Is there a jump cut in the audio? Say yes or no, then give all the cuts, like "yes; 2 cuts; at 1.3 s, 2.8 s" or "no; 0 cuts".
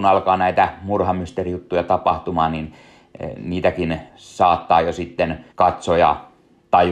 yes; 2 cuts; at 4.1 s, 5.5 s